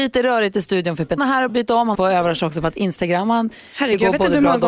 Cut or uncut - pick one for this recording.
cut